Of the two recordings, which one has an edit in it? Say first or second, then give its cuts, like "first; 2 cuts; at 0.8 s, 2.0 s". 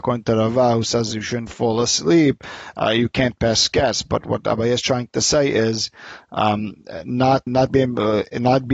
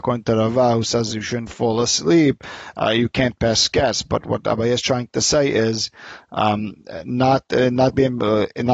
first; 1 cut; at 7.5 s